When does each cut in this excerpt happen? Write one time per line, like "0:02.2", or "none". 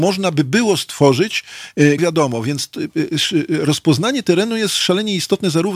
0:02.0